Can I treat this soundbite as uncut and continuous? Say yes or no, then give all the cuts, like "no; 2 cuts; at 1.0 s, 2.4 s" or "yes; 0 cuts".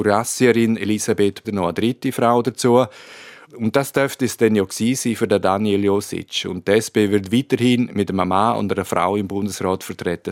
no; 1 cut; at 1.4 s